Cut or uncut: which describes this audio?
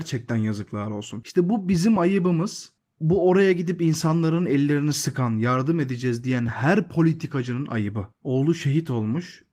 uncut